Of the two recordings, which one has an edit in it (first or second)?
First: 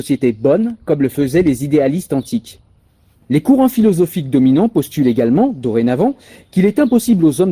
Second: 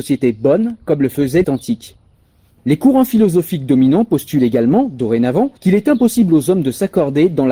second